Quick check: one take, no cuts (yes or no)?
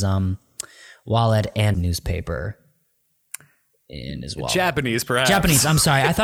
no